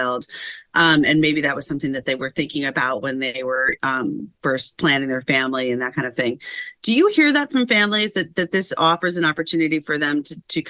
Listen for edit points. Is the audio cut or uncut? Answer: uncut